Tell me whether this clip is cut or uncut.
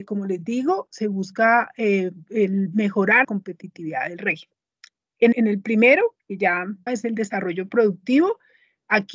cut